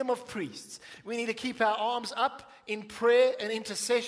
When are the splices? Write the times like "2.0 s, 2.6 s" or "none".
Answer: none